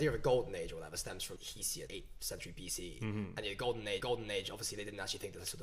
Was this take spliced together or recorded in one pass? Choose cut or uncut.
cut